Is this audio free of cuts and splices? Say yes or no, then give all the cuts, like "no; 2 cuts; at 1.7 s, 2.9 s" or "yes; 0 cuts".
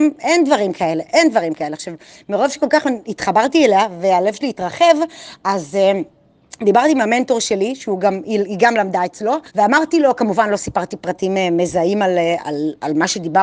no; 2 cuts; at 9.5 s, 12.4 s